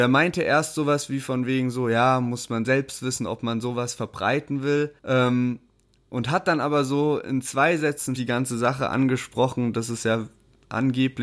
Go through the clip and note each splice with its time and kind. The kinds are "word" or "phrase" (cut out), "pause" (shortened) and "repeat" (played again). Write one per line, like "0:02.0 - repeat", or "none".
0:05.0 - pause
0:08.2 - phrase